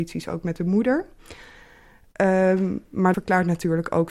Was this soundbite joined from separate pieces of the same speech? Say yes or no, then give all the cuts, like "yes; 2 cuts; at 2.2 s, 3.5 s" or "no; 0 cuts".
yes; 1 cut; at 3.1 s